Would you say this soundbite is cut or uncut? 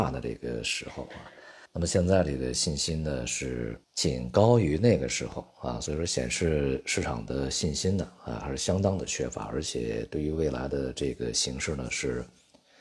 cut